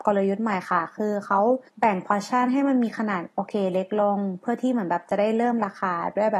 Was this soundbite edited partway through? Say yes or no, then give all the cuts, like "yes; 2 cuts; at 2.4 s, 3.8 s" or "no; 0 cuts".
yes; 1 cut; at 1.7 s